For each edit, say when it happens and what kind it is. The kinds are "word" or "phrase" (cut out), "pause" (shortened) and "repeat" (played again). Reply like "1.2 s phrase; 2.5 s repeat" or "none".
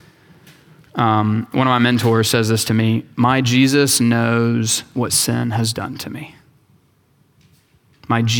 none